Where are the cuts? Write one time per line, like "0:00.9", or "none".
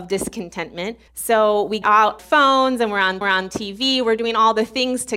0:01.1
0:01.8
0:02.2
0:03.2